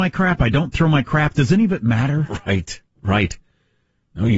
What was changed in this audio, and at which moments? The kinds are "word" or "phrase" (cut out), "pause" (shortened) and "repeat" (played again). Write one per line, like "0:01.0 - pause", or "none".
none